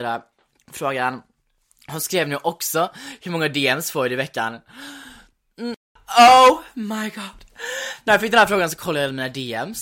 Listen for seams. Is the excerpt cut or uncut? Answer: uncut